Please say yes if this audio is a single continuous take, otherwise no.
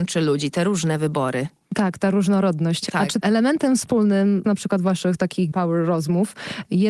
no